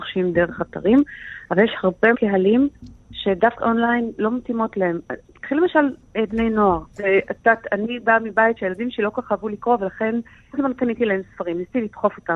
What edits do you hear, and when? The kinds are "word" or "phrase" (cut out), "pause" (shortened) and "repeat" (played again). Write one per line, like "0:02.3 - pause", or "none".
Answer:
0:02.1 - word
0:03.6 - word
0:06.3 - word
0:06.9 - pause
0:10.5 - word